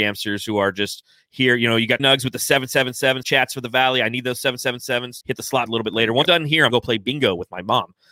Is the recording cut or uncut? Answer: cut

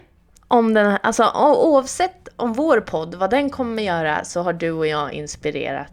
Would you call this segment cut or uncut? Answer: uncut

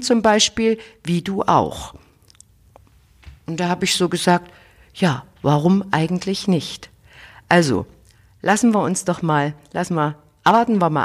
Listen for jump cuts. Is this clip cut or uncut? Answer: uncut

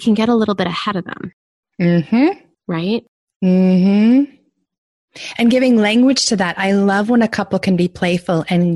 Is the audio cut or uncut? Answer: cut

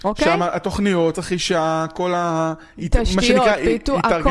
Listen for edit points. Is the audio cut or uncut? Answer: cut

